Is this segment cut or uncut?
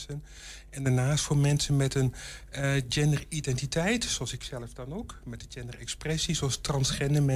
uncut